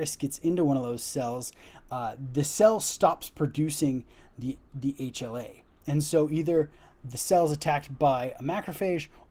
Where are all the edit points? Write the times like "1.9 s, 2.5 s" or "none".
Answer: none